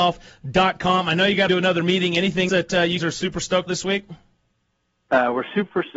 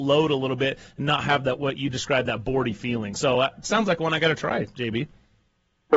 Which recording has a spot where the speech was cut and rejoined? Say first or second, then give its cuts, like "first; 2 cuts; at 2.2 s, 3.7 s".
first; 4 cuts; at 1.5 s, 2.5 s, 3.0 s, 3.7 s